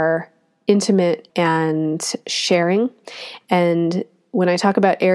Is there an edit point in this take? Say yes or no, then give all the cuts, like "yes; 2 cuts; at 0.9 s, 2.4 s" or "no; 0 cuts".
yes; 1 cut; at 1.3 s